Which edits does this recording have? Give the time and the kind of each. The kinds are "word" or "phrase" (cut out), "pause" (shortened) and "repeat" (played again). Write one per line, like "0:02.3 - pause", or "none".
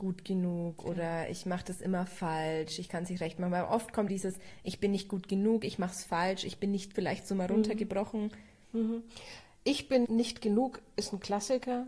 0:04.1 - word
0:06.9 - word
0:10.0 - word